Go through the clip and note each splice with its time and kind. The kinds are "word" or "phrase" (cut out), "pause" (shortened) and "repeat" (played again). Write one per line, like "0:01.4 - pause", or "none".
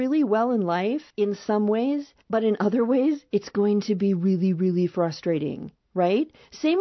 0:01.1 - pause
0:02.2 - pause